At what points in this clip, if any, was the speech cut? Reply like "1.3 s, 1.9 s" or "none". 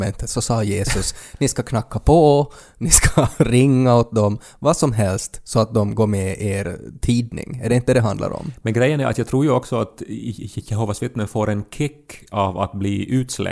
none